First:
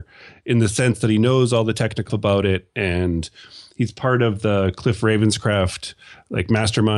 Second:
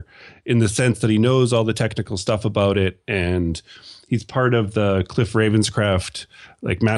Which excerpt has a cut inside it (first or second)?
first